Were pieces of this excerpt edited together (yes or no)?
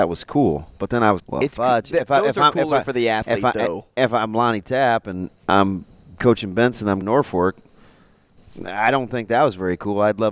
yes